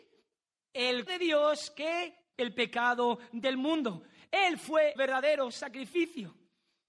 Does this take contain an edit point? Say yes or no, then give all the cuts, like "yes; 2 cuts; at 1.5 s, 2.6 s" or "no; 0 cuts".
yes; 3 cuts; at 1.1 s, 2.3 s, 5.0 s